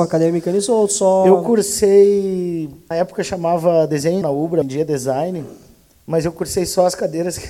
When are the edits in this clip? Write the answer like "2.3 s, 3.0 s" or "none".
2.9 s, 4.2 s, 4.6 s